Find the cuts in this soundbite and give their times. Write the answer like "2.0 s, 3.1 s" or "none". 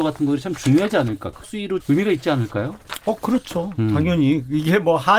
1.4 s, 1.8 s